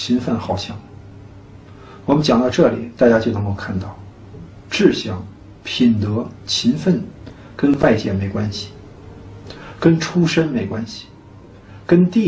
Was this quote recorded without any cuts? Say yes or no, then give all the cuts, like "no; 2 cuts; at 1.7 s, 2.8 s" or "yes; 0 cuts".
no; 1 cut; at 5.6 s